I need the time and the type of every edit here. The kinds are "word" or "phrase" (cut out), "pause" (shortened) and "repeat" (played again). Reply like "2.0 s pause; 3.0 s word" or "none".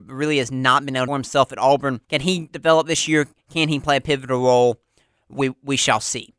1.1 s phrase; 2.0 s pause; 3.4 s pause